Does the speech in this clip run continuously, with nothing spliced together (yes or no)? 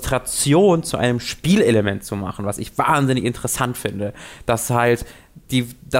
yes